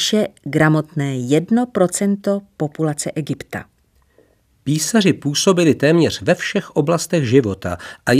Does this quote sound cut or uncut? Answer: uncut